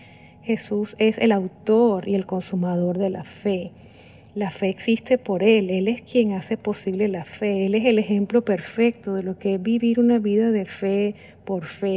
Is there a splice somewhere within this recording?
no; 0 cuts

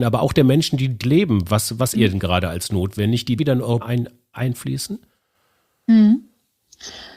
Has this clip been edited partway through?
yes; 4 cuts; at 1.0 s, 1.9 s, 3.4 s, 3.8 s

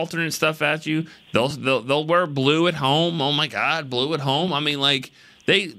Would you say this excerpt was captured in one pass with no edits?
yes; 0 cuts

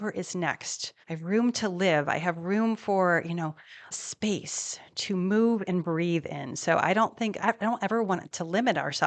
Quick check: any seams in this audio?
yes; 3 cuts; at 1.0 s, 3.9 s, 7.4 s

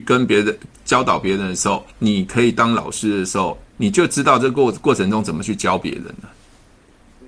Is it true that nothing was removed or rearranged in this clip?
no; 1 cut; at 1.9 s

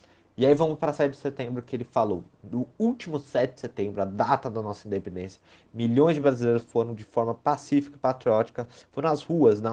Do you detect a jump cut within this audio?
no; 0 cuts

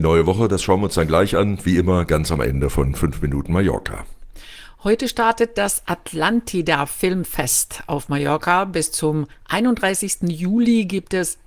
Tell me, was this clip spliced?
no; 0 cuts

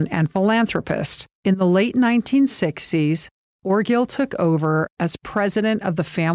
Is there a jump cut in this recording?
no; 0 cuts

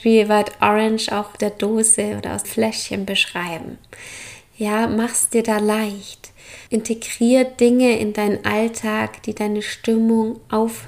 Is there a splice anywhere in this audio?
yes; 3 cuts; at 1.4 s, 2.4 s, 6.7 s

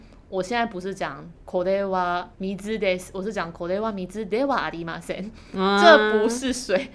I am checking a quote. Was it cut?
yes; 2 cuts; at 1.4 s, 2.3 s

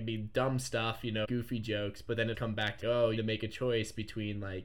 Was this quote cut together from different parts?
yes; 4 cuts; at 1.2 s, 2.3 s, 2.8 s, 3.2 s

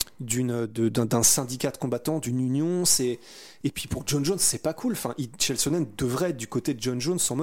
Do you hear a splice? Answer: no; 0 cuts

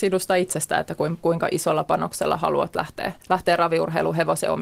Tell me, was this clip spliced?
yes; 2 cuts; at 1.2 s, 3.2 s

